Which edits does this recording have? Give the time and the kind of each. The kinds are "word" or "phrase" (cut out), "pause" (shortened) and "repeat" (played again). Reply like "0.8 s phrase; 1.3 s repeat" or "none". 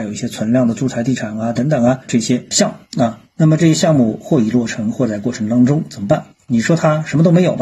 2.1 s word

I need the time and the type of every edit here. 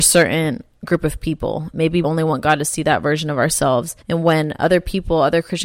2.0 s word; 4.0 s pause

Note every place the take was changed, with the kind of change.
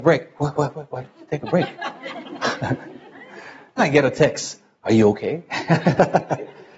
3.8 s word

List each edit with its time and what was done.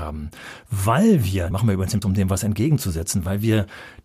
1.5 s word; 2.0 s word

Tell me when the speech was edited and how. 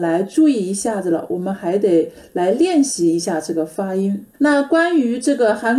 4.3 s pause

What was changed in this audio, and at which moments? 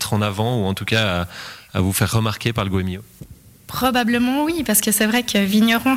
none

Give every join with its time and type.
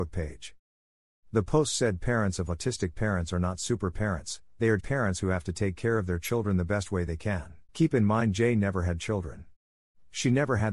4.8 s word; 7.7 s pause

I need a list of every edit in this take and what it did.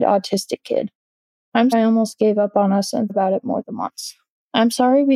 1.7 s word; 3.1 s word

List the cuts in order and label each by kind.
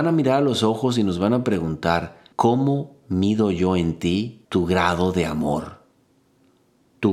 2.3 s pause; 4.4 s pause

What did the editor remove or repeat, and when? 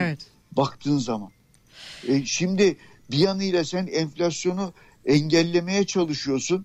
none

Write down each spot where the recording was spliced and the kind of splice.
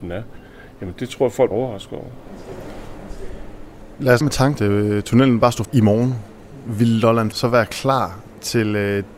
1.0 s word; 1.5 s word; 4.2 s word; 4.5 s phrase; 5.6 s word; 7.3 s word

